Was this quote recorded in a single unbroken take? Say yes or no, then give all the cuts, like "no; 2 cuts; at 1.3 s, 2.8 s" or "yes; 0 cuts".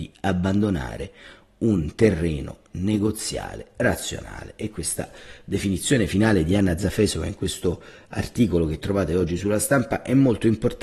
yes; 0 cuts